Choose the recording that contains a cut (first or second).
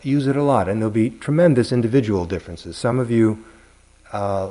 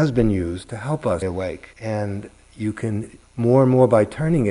second